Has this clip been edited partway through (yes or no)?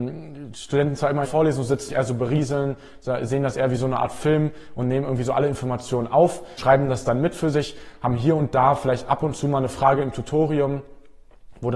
yes